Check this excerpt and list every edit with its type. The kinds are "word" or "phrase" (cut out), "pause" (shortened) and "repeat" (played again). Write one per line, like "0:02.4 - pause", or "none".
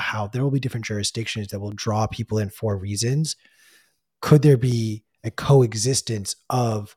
none